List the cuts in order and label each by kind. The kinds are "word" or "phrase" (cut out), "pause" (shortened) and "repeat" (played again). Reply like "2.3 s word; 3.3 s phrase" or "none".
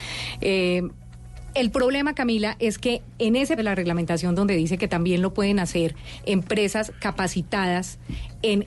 3.6 s word